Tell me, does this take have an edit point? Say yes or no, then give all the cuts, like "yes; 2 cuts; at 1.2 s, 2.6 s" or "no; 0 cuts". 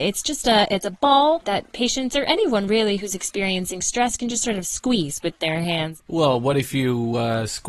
no; 0 cuts